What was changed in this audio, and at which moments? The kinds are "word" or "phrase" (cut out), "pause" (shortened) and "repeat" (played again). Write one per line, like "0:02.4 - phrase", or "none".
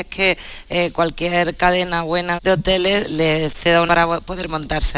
0:02.4 - word
0:03.1 - word
0:03.9 - word